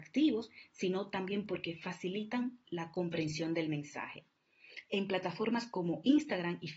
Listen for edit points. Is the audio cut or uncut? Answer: uncut